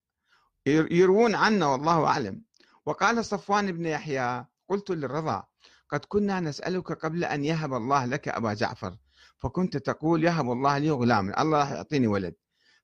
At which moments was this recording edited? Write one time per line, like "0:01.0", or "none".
none